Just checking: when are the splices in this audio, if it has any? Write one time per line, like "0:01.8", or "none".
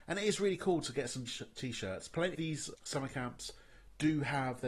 0:01.3
0:02.3
0:02.7